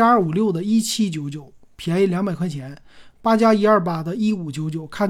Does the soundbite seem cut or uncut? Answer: uncut